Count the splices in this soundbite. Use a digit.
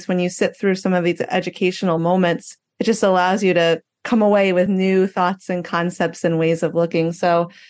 0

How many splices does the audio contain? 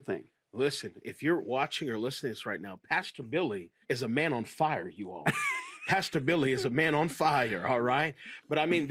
1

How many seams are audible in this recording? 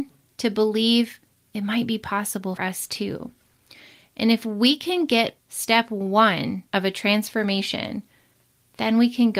3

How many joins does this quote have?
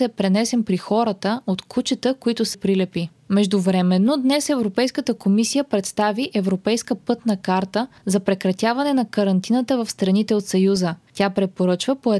1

